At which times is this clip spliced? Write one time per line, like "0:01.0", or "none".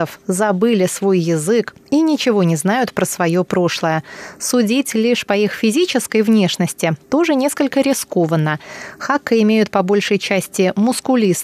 none